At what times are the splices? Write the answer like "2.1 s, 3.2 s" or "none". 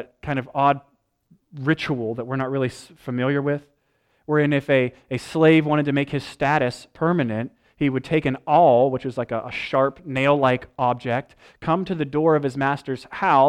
none